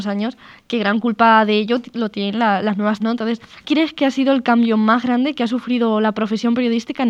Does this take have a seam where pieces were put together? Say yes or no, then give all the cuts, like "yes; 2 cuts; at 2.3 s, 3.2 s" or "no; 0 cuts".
yes; 2 cuts; at 3.0 s, 3.6 s